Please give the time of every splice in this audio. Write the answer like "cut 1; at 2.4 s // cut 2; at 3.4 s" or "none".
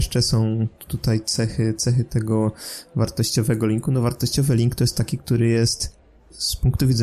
none